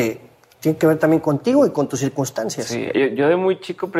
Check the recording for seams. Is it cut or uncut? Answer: uncut